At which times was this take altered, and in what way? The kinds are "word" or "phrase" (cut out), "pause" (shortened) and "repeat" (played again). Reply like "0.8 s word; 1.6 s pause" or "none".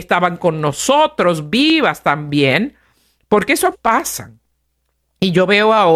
3.7 s word